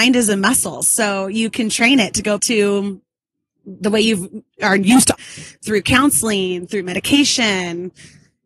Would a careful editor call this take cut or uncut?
cut